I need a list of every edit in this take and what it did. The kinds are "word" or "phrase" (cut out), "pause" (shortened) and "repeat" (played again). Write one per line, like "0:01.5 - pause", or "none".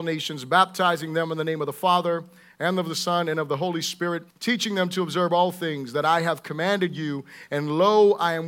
0:04.3 - pause